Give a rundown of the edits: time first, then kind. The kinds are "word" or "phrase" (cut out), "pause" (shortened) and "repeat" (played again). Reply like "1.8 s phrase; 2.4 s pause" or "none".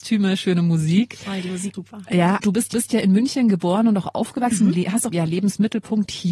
1.7 s word; 2.4 s word; 2.7 s repeat; 5.1 s phrase